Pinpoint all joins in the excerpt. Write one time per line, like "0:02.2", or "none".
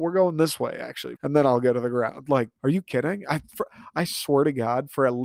0:01.2
0:02.6